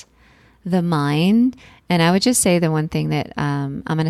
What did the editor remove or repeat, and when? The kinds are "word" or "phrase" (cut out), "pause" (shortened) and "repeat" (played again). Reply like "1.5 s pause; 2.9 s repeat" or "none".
none